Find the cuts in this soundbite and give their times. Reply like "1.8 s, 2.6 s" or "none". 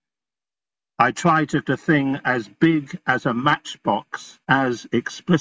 1.6 s, 4.4 s